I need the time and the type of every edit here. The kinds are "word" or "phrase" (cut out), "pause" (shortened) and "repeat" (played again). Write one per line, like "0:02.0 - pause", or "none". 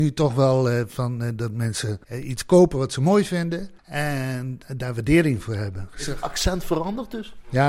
0:02.0 - pause
0:03.8 - pause